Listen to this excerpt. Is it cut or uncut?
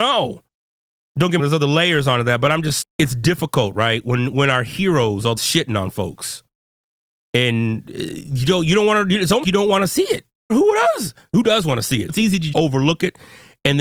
cut